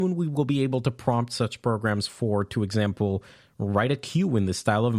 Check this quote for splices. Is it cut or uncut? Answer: uncut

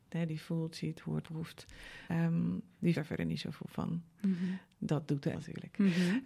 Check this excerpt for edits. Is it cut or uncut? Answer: cut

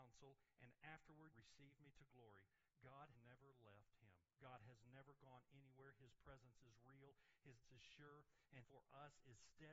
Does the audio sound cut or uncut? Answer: cut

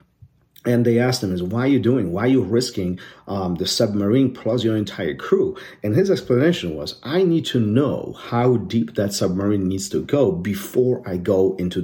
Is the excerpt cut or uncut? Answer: uncut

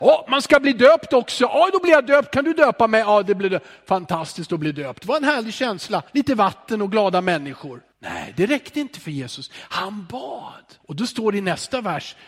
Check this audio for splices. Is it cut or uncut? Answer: cut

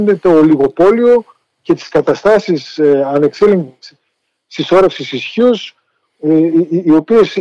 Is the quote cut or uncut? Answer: uncut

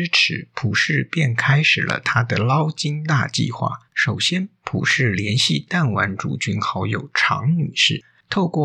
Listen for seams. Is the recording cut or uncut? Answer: cut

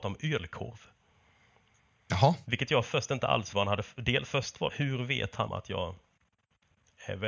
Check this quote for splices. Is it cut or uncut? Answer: cut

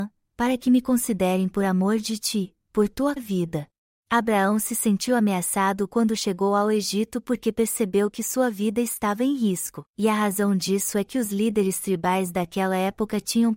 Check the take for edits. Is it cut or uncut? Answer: cut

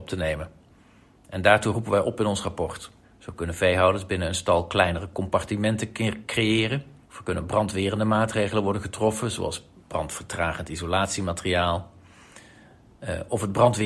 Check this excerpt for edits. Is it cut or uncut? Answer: cut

